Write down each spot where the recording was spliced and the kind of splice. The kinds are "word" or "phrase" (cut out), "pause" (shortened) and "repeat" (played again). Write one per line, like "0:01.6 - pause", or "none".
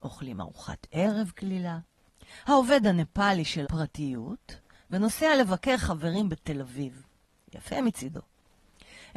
0:03.6 - phrase

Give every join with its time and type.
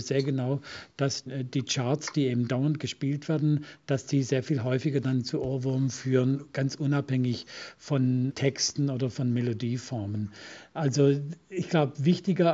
none

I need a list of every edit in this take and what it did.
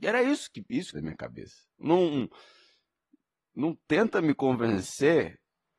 0:00.9 - phrase
0:01.7 - pause

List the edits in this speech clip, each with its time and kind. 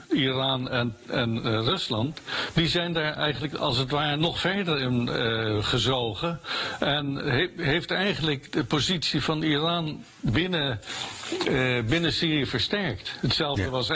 none

